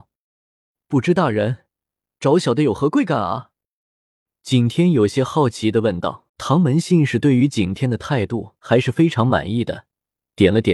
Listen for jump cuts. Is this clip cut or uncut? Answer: cut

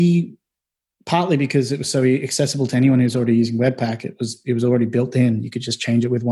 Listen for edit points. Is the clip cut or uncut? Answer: uncut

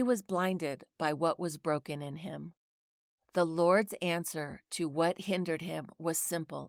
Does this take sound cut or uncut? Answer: uncut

